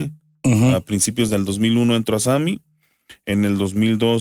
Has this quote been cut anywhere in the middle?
no; 0 cuts

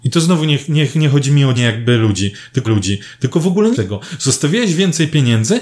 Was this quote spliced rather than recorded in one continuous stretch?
yes; 3 cuts; at 1.6 s, 2.7 s, 3.7 s

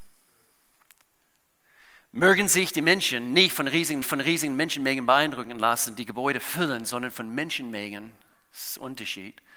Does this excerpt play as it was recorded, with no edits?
no; 1 cut; at 4.0 s

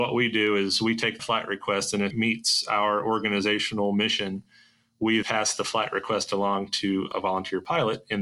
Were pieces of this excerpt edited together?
yes; 3 cuts; at 1.2 s, 2.1 s, 5.2 s

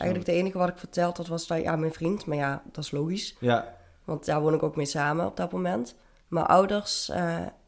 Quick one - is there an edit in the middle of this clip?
no; 0 cuts

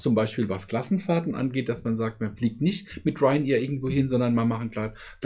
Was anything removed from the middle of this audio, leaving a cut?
no; 0 cuts

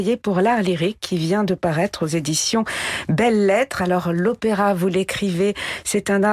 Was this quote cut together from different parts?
no; 0 cuts

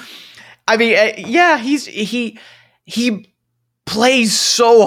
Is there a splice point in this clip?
no; 0 cuts

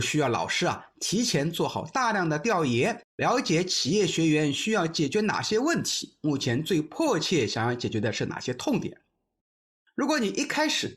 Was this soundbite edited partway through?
yes; 1 cut; at 3.1 s

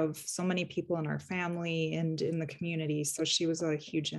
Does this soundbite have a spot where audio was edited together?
no; 0 cuts

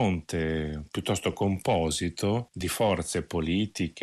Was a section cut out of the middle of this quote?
no; 0 cuts

